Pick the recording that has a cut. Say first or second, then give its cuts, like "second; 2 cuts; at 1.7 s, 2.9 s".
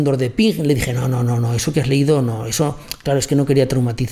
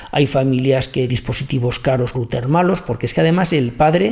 second; 2 cuts; at 1.1 s, 2.1 s